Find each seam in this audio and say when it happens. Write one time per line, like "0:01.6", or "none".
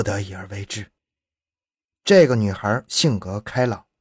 0:01.0

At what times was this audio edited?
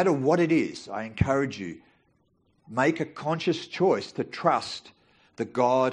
none

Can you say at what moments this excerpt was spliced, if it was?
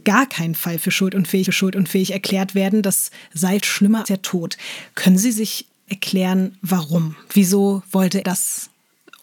0:01.5
0:03.6
0:04.0
0:05.9
0:08.2

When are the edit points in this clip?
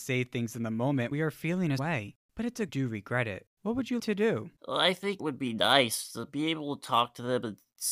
0:01.1
0:01.8
0:02.2
0:02.7
0:03.5
0:04.0
0:04.6
0:05.2

